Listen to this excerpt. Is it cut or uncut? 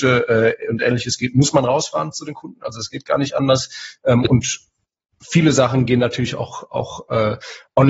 uncut